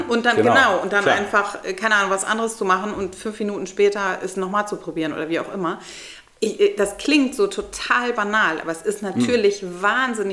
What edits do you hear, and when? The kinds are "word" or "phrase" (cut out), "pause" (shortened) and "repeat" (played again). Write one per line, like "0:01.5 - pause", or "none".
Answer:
none